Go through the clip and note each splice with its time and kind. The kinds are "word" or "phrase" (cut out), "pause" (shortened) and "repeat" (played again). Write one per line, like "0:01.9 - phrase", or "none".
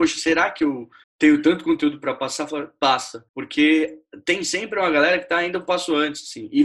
0:01.0 - pause
0:03.3 - pause

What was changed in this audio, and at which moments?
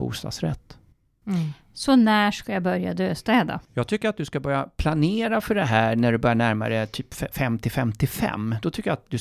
0:03.7 - pause

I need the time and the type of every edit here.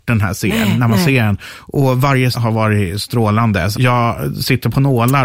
0:02.3 - word
0:03.7 - word

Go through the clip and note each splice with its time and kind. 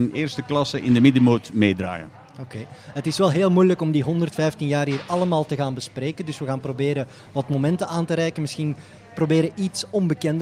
none

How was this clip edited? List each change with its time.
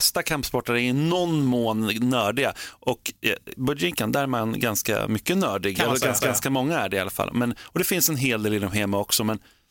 0:06.2 - repeat

